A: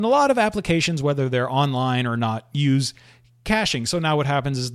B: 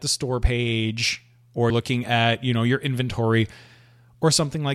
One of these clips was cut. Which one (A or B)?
B